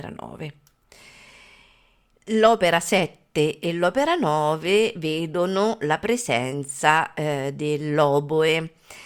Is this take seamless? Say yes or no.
yes